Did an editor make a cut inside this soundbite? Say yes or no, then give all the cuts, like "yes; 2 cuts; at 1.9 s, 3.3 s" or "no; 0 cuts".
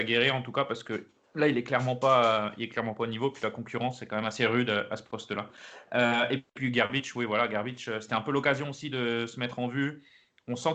no; 0 cuts